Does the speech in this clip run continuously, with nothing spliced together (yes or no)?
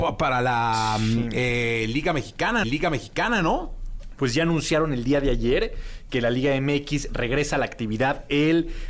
no